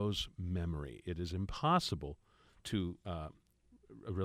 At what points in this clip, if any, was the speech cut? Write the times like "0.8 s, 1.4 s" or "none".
3.0 s